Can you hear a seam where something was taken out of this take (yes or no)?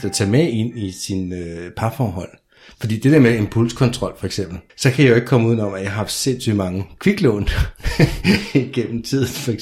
yes